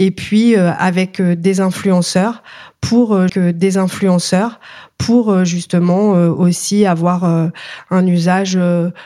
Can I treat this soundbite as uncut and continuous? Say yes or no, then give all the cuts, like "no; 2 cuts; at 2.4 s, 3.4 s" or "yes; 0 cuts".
no; 1 cut; at 3.3 s